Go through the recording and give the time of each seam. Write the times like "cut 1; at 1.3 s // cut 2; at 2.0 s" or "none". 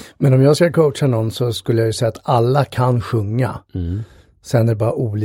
none